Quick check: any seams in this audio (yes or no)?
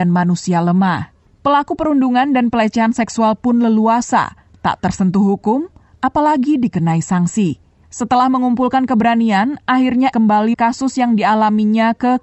yes